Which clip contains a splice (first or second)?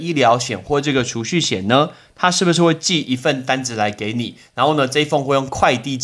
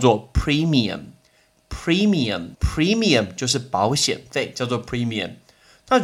second